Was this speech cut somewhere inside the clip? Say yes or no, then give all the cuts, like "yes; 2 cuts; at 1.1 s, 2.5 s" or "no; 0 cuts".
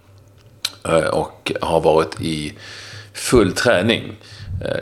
no; 0 cuts